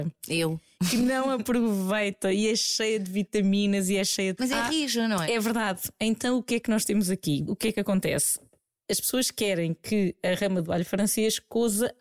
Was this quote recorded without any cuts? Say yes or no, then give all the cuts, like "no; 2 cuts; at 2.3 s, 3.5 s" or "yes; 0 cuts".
no; 3 cuts; at 4.4 s, 5.2 s, 7.4 s